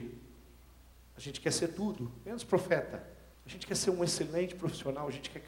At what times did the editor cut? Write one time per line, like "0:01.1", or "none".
0:03.3